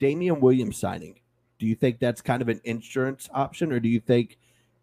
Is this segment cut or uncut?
uncut